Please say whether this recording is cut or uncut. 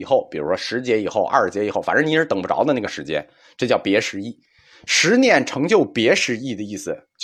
uncut